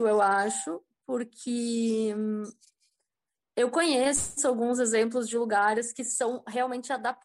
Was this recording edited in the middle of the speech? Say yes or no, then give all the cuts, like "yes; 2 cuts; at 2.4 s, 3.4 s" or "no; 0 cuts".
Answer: no; 0 cuts